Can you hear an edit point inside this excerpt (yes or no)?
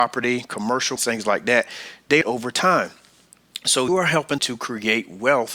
yes